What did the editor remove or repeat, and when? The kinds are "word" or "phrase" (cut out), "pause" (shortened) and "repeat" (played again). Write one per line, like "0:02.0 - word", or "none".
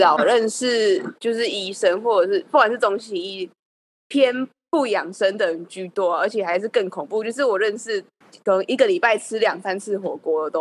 none

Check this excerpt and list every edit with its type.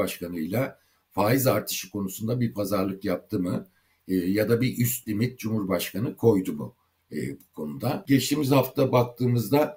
none

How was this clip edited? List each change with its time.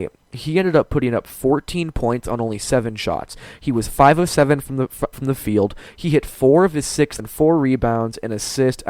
0:05.1 - word
0:07.2 - phrase

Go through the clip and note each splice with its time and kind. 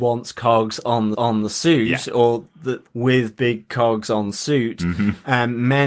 0:01.1 - repeat
0:02.9 - word

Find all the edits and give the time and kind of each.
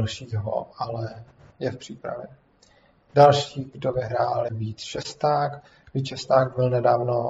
0:04.5 - word

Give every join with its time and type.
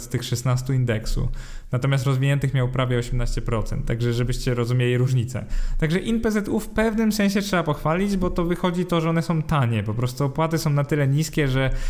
none

